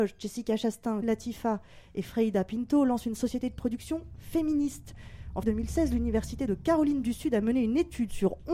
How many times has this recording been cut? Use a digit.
2